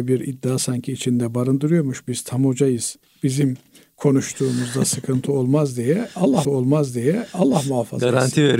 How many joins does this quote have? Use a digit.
2